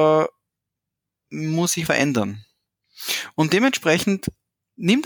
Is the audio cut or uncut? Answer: cut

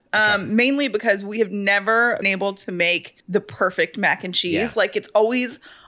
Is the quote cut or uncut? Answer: cut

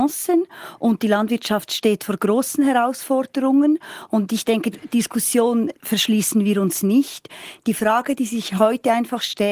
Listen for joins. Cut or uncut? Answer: cut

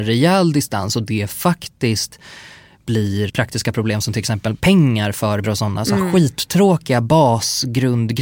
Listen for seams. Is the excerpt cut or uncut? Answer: cut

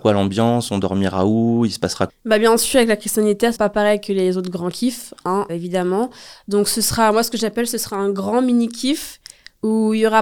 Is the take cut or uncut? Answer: cut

